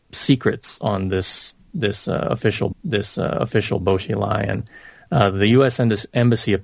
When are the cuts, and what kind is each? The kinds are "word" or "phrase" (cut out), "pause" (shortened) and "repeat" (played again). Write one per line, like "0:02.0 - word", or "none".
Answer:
0:02.7 - repeat